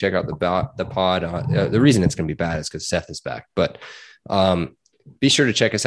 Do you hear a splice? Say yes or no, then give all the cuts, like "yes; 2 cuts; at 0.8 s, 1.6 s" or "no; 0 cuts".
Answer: no; 0 cuts